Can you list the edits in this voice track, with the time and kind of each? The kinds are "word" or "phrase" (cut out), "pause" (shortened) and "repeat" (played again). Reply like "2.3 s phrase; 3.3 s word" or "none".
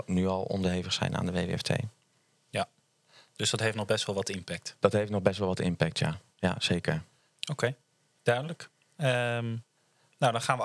none